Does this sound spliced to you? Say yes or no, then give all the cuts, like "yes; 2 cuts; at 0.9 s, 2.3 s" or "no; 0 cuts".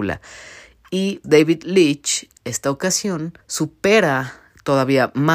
yes; 2 cuts; at 1.2 s, 3.4 s